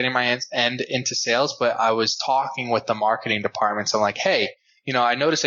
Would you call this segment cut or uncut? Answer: uncut